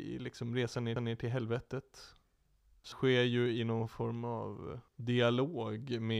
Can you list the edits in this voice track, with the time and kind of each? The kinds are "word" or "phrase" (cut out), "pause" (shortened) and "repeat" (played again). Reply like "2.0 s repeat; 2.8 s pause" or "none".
1.0 s repeat; 2.9 s word; 4.9 s pause